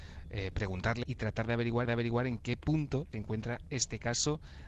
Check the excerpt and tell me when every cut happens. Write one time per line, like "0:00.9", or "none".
0:01.0
0:01.8
0:03.1